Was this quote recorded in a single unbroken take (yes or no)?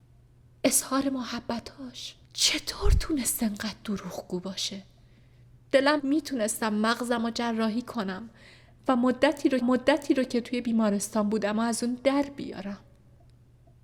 no